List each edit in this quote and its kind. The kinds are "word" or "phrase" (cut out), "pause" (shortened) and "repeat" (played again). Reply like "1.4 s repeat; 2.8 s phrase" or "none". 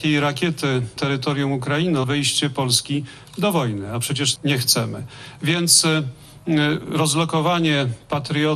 1.0 s word; 2.0 s word; 4.4 s word